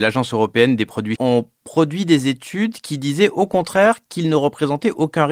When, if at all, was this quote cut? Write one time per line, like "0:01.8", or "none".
0:01.2